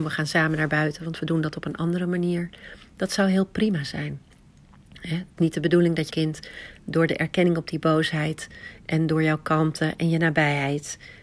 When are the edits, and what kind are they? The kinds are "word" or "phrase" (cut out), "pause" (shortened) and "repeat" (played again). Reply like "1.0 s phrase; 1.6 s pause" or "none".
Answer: 5.4 s word; 6.1 s word